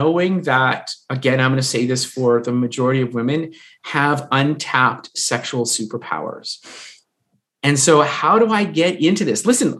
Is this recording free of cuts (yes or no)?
yes